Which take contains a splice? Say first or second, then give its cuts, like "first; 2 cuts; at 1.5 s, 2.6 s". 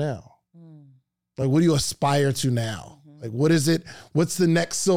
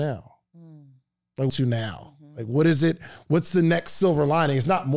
second; 1 cut; at 1.5 s